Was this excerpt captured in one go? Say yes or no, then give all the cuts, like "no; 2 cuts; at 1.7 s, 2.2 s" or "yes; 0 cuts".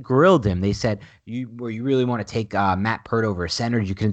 yes; 0 cuts